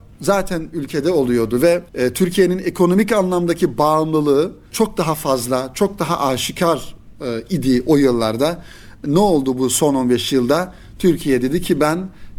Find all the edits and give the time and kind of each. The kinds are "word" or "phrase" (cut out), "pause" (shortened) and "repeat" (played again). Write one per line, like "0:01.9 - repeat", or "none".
0:01.9 - pause